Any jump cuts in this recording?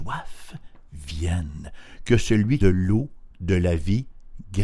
yes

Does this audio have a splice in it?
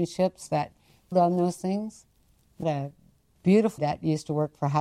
yes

